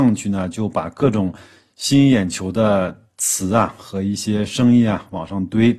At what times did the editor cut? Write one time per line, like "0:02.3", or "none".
none